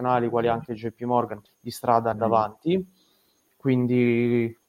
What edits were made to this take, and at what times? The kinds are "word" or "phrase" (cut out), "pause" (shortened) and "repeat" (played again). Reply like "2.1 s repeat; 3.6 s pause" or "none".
1.5 s word; 2.1 s phrase